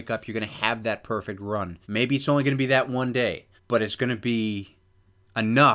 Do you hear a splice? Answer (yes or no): yes